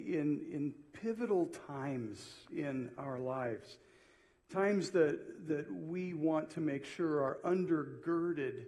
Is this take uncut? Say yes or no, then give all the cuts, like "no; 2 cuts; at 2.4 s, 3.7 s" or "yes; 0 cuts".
yes; 0 cuts